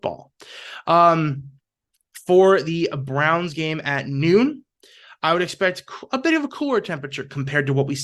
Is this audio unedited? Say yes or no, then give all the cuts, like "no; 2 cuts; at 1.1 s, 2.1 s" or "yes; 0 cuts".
yes; 0 cuts